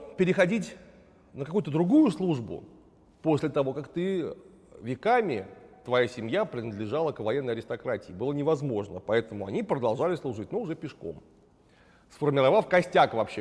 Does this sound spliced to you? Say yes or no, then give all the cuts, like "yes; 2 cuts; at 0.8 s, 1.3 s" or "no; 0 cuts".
no; 0 cuts